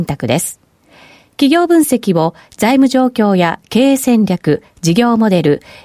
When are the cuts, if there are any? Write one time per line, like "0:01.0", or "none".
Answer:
none